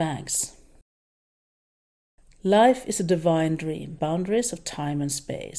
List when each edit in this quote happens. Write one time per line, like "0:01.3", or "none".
0:04.0